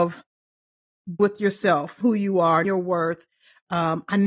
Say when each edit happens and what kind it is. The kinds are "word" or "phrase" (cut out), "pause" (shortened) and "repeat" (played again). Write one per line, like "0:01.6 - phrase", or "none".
0:01.2 - word
0:02.0 - word
0:02.6 - word